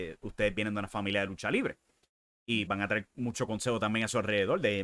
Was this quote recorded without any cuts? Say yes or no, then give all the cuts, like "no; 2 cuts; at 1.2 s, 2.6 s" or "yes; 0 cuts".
no; 1 cut; at 2.7 s